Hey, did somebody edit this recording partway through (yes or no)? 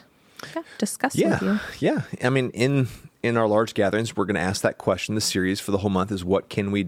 no